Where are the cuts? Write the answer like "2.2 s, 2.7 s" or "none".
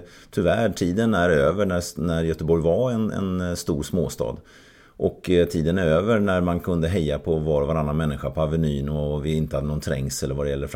none